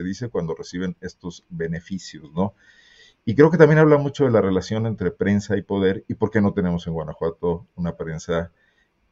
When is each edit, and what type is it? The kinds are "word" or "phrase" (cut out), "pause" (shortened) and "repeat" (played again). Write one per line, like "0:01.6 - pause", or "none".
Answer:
none

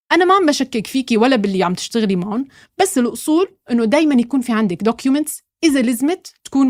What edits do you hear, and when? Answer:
none

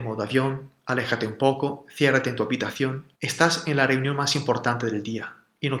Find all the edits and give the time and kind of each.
0:03.1 - pause

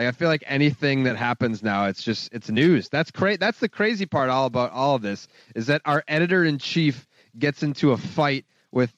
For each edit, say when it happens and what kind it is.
none

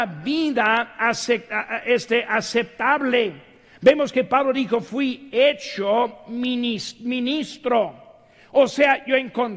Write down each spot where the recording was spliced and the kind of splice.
none

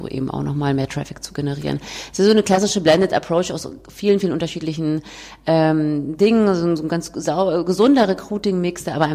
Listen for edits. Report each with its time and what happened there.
none

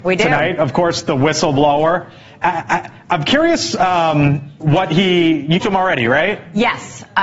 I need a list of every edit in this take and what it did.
0:05.6 - phrase

